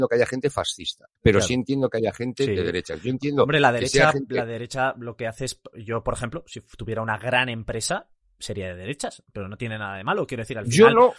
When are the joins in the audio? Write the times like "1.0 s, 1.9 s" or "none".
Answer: 1.2 s